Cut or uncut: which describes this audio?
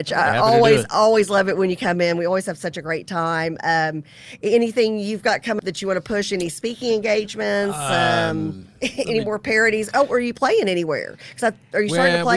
cut